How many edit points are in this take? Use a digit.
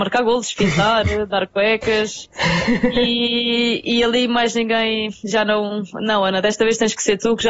0